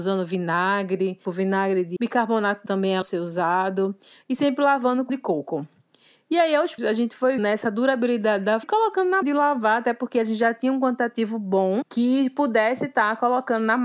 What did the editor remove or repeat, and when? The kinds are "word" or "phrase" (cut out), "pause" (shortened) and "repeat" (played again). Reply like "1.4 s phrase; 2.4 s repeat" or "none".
2.0 s word; 2.7 s word; 3.0 s word; 5.1 s word; 6.8 s word; 7.4 s word; 8.6 s word; 9.2 s word